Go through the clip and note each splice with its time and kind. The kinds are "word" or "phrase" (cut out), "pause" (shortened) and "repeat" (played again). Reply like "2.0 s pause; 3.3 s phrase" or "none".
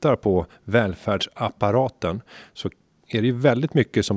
none